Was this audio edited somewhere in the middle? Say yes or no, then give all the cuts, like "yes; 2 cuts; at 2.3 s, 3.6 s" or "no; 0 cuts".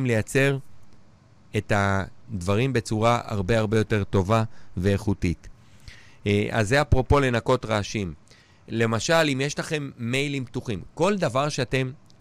no; 0 cuts